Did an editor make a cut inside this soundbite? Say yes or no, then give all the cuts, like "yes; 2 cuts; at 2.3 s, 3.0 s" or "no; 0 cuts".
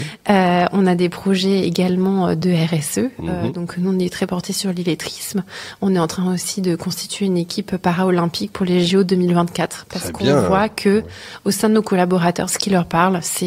no; 0 cuts